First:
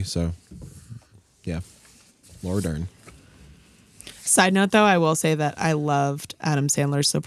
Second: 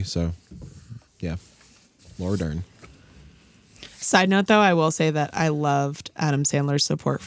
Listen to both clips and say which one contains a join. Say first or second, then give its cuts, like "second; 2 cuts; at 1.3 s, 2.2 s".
second; 1 cut; at 1.1 s